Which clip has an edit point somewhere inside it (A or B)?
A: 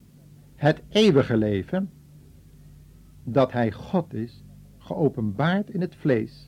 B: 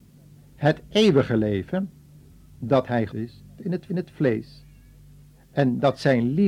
B